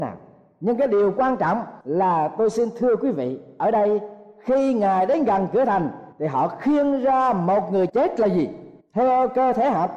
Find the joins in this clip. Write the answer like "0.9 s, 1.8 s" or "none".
1.8 s, 6.1 s, 7.9 s, 8.8 s